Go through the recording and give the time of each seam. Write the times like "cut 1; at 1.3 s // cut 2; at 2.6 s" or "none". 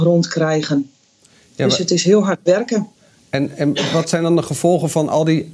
none